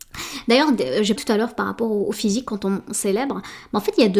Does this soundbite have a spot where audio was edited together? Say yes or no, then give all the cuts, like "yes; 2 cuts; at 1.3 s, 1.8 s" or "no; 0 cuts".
yes; 2 cuts; at 1.2 s, 2.1 s